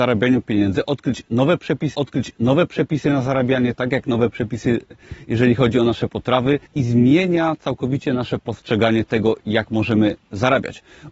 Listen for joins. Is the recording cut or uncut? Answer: cut